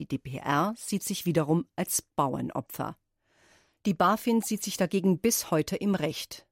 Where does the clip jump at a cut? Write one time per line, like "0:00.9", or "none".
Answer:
none